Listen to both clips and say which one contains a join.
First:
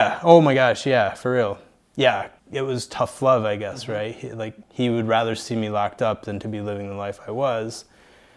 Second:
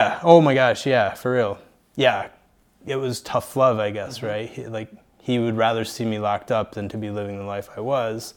first; 2 cuts; at 2.4 s, 4.6 s

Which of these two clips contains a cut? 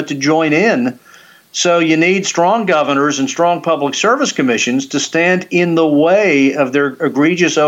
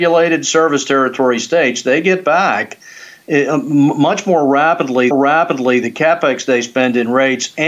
second; 1 cut; at 5.1 s

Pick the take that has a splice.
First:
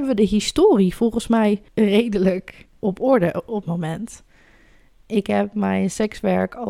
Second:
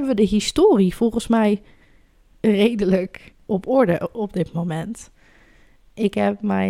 first; 2 cuts; at 1.7 s, 3.6 s

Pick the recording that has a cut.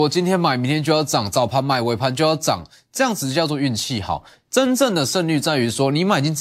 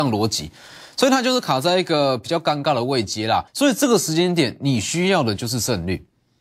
second; 1 cut; at 3.5 s

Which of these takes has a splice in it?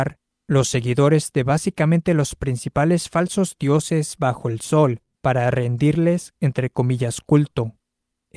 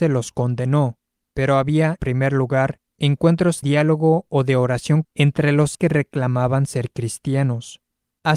second; 4 cuts; at 2.0 s, 3.6 s, 5.0 s, 5.7 s

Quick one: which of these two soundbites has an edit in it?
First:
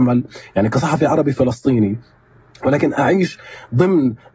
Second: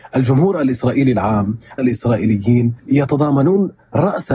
second; 2 cuts; at 1.8 s, 2.8 s

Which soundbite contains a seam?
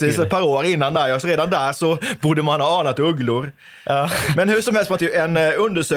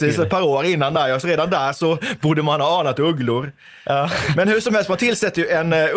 first; 1 cut; at 5.0 s

